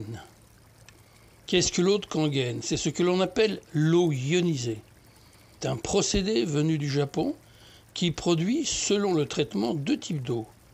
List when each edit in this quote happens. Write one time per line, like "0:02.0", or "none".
none